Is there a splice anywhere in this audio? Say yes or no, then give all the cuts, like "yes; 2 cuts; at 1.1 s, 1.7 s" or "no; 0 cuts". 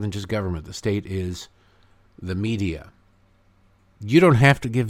no; 0 cuts